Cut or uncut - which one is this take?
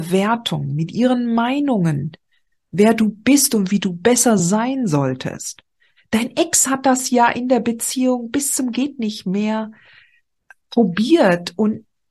uncut